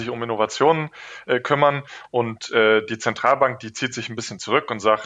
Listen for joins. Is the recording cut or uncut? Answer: uncut